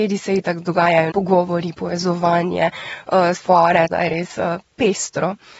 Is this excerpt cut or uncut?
cut